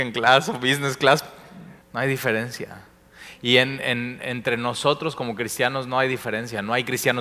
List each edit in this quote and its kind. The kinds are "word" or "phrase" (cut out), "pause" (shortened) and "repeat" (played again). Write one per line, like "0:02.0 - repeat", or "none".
0:01.8 - pause